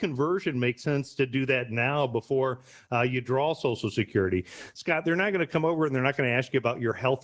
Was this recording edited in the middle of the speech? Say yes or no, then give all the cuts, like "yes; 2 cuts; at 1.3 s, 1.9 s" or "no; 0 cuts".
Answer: no; 0 cuts